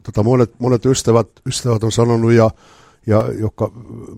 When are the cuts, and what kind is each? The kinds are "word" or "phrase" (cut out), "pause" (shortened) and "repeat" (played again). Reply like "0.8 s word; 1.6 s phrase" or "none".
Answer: none